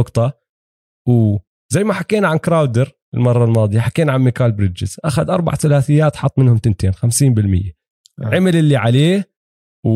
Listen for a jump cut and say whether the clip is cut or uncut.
uncut